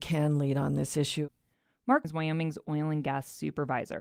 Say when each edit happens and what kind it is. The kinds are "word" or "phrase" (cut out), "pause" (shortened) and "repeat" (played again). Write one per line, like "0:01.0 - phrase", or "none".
0:02.0 - word